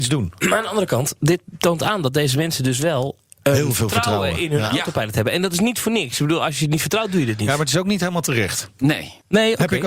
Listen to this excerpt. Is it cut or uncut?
uncut